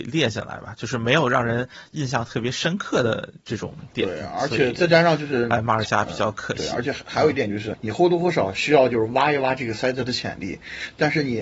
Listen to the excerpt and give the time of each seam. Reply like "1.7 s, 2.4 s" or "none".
7.7 s